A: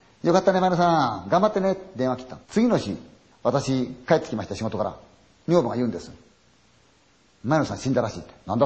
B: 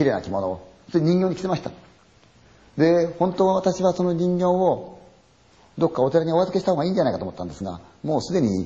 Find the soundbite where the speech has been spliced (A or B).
A